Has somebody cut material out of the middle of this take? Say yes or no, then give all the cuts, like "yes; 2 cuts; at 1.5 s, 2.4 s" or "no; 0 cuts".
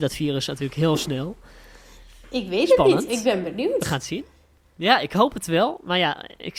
no; 0 cuts